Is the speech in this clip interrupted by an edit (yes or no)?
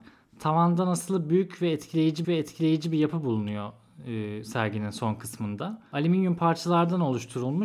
yes